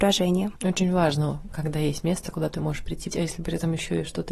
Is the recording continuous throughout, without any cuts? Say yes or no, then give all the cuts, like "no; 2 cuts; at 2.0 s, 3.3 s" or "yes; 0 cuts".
no; 1 cut; at 3.1 s